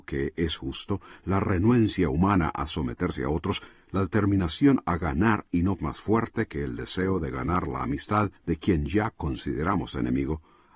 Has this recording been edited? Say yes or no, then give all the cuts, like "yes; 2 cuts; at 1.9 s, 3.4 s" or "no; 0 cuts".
yes; 2 cuts; at 5.8 s, 8.4 s